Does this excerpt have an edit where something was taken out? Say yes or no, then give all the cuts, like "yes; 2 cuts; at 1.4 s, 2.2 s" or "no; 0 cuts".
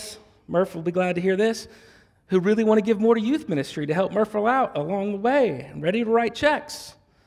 no; 0 cuts